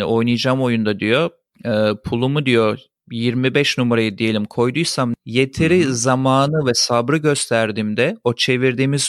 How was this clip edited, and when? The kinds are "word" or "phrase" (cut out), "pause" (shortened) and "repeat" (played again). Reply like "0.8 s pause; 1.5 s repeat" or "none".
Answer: none